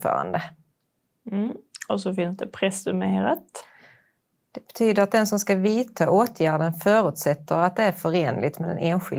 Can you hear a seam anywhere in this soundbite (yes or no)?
no